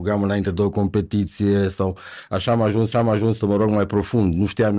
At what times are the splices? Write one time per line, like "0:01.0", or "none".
0:02.9